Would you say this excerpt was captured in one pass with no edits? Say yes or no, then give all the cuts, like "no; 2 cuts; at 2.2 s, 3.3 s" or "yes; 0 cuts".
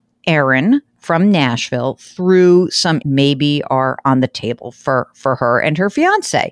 no; 1 cut; at 3.0 s